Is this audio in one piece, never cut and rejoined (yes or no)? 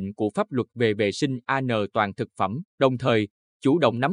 no